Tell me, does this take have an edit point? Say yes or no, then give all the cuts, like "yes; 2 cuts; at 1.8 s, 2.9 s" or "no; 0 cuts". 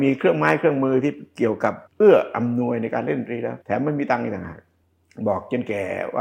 yes; 2 cuts; at 1.9 s, 3.6 s